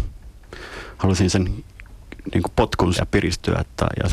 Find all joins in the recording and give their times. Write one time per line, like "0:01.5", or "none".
0:03.0